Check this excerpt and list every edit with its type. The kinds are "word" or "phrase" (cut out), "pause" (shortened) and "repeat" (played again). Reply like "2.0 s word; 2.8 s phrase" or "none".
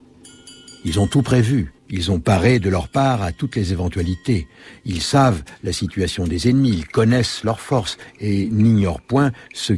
1.8 s pause

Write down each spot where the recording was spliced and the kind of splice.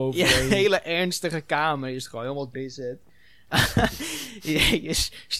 2.5 s word

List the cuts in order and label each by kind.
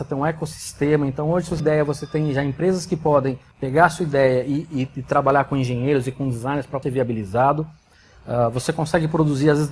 1.6 s phrase; 3.5 s pause; 6.8 s phrase

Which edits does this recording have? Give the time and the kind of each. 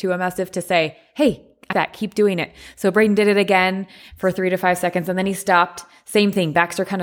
1.7 s word

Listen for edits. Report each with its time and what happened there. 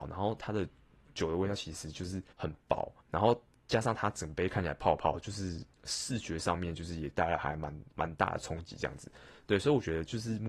2.3 s pause; 3.0 s pause; 5.7 s pause

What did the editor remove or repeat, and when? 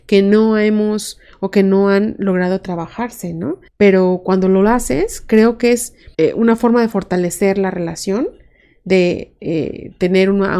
3.7 s pause; 6.1 s pause

